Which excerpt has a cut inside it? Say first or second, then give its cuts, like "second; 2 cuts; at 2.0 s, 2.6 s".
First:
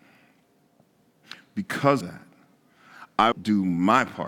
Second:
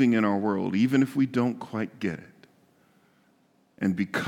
first; 2 cuts; at 2.0 s, 3.3 s